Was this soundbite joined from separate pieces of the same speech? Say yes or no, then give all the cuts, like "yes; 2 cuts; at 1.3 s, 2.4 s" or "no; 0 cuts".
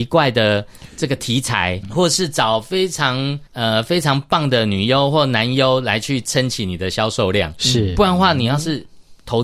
yes; 2 cuts; at 1.8 s, 3.5 s